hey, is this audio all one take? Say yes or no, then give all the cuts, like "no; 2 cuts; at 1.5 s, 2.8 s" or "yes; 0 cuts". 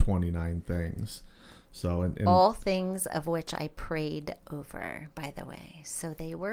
yes; 0 cuts